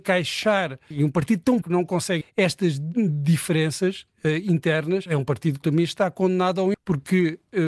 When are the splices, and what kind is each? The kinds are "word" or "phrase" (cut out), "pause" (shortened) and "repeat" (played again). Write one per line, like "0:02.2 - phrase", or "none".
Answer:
0:00.9 - word
0:01.6 - word
0:02.2 - word
0:05.1 - word
0:05.6 - word
0:06.7 - word